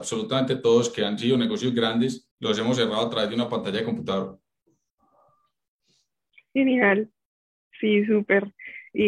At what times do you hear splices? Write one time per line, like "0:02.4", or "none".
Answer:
0:02.3
0:07.3